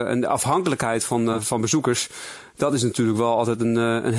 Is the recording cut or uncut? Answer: uncut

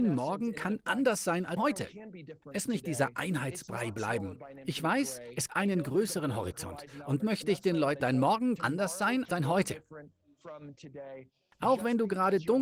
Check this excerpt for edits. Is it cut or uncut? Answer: cut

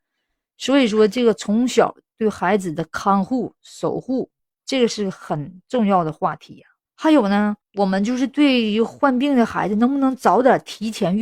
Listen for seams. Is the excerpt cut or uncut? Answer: cut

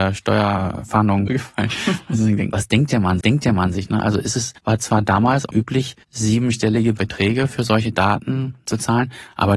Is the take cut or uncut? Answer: cut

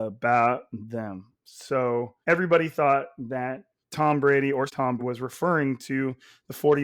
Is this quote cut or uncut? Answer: cut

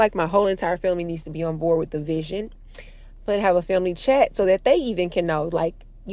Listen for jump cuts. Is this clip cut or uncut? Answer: uncut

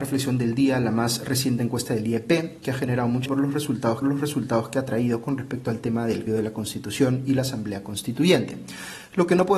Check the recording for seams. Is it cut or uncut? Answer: cut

